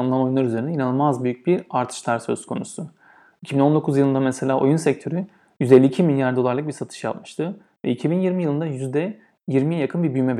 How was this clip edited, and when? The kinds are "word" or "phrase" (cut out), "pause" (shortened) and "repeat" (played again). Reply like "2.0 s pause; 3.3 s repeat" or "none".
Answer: none